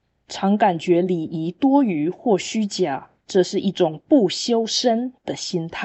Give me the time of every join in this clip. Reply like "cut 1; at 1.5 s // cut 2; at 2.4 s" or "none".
cut 1; at 3.2 s